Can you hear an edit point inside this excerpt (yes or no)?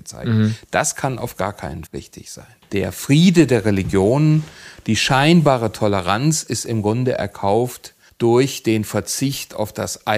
yes